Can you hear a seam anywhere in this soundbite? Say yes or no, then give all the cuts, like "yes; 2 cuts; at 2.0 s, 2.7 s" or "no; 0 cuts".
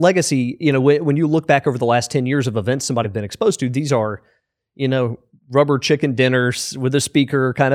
yes; 1 cut; at 3.0 s